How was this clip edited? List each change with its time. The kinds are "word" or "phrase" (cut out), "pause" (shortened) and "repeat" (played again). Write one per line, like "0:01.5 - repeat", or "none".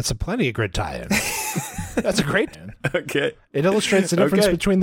0:02.5 - word